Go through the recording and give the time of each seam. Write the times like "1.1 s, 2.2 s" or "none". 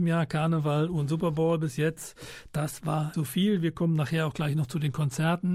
3.1 s